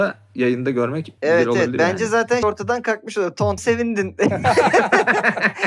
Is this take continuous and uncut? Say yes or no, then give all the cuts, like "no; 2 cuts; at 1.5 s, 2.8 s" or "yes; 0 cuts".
no; 3 cuts; at 1.2 s, 2.4 s, 3.6 s